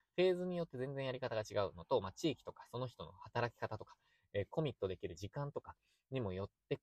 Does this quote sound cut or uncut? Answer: uncut